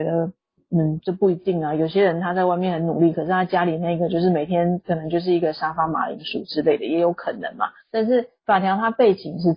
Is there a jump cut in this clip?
yes; 1 cut; at 7.8 s

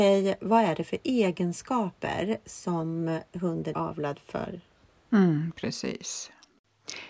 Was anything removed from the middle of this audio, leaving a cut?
yes; 1 cut; at 3.7 s

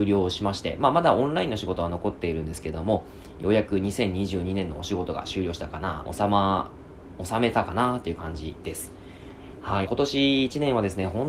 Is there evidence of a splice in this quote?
yes; 2 cuts; at 6.1 s, 9.9 s

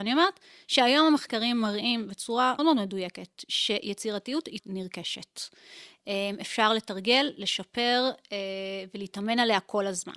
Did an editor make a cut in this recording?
yes; 2 cuts; at 2.6 s, 4.6 s

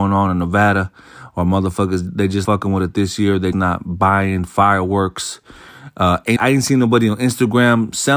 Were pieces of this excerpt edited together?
yes; 3 cuts; at 2.4 s, 3.5 s, 6.4 s

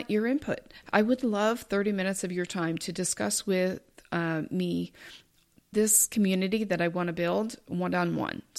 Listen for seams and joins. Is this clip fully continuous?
yes; 0 cuts

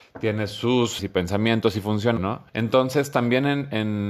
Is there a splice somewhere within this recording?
yes; 3 cuts; at 1.0 s, 2.2 s, 2.5 s

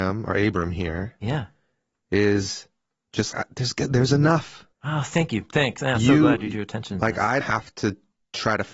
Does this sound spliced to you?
yes; 3 cuts; at 3.3 s, 4.7 s, 7.4 s

